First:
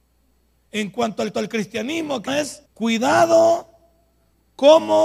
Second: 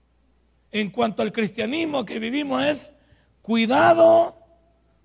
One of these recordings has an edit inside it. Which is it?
first; 3 cuts; at 1.3 s, 2.3 s, 2.7 s

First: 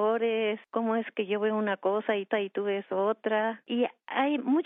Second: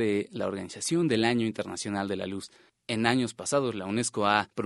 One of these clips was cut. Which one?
first; 1 cut; at 2.3 s

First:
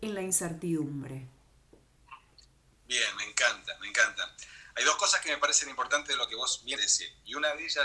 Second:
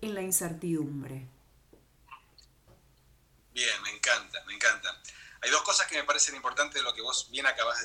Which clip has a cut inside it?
first; 2 cuts; at 2.6 s, 6.8 s

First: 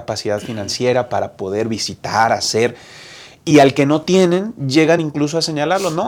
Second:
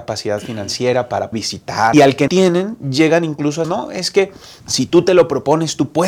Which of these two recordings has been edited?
second; 5 cuts; at 1.3 s, 1.9 s, 2.3 s, 3.6 s, 4.6 s

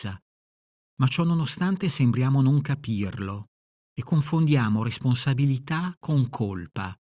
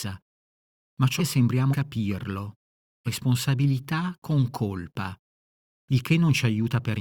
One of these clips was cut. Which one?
second; 3 cuts; at 1.2 s, 1.7 s, 3.1 s

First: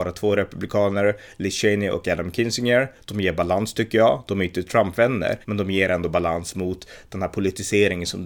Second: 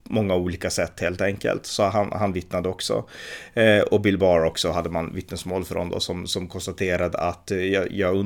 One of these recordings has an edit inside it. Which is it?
first; 1 cut; at 5.4 s

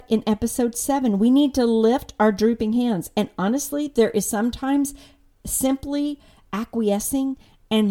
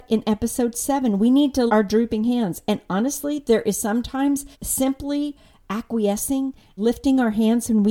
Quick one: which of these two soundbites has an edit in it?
second; 3 cuts; at 1.7 s, 4.5 s, 6.8 s

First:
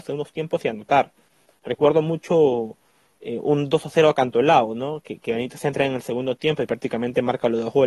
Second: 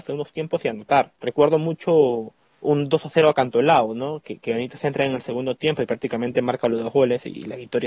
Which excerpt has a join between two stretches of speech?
second; 2 cuts; at 1.2 s, 2.6 s

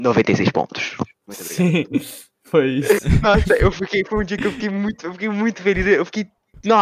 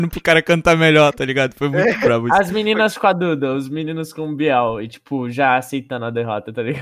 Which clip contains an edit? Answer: first; 2 cuts; at 1.1 s, 2.4 s

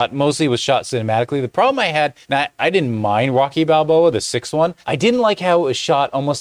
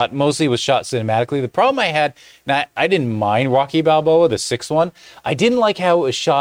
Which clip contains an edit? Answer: first; 2 cuts; at 2.2 s, 4.8 s

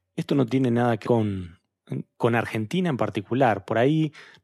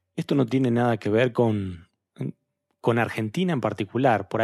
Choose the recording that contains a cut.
first; 2 cuts; at 1.0 s, 2.1 s

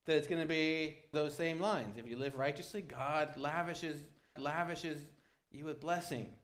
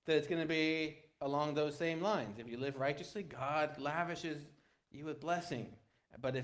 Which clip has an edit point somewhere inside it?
first; 2 cuts; at 1.1 s, 4.4 s

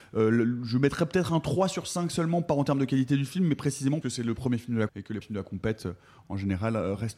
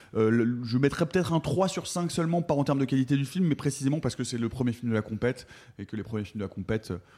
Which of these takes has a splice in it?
first; 3 cuts; at 4.0 s, 4.9 s, 5.2 s

